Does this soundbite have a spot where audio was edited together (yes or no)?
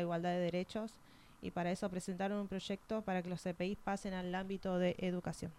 no